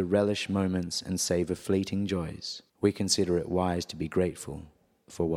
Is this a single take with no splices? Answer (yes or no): no